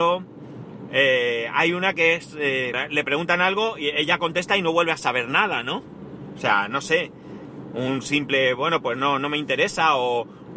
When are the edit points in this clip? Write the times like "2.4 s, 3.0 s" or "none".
2.7 s